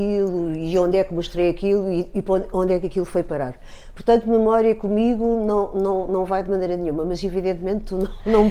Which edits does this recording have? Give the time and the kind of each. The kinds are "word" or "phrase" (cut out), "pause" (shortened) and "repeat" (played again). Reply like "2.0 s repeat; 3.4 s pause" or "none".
none